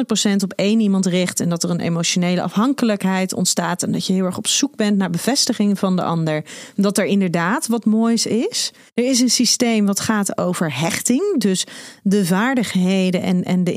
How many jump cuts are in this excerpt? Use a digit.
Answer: 1